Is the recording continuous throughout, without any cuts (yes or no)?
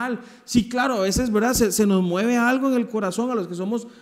yes